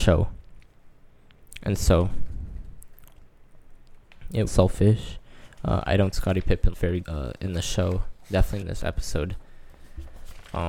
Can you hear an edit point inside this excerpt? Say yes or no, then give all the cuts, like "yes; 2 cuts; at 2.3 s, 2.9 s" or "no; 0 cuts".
yes; 5 cuts; at 4.5 s, 6.1 s, 6.7 s, 7.0 s, 8.6 s